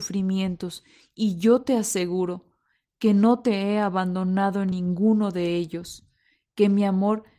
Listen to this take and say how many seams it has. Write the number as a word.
zero